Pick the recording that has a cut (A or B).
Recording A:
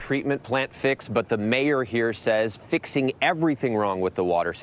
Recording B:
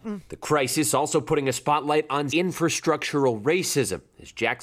B